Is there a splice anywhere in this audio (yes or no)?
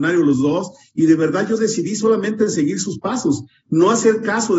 no